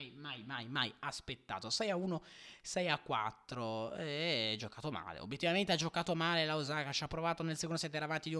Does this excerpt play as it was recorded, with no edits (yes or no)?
yes